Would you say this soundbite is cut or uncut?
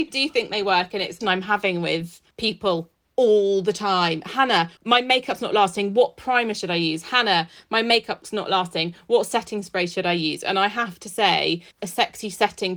cut